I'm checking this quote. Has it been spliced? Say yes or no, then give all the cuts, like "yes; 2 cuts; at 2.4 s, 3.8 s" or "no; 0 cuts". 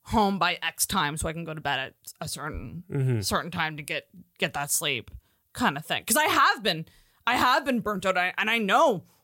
no; 0 cuts